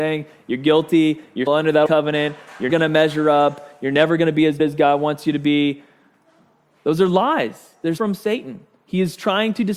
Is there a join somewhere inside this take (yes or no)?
yes